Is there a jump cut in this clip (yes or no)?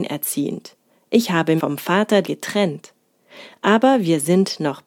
yes